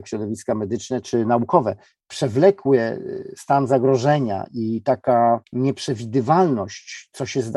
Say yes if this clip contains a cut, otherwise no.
yes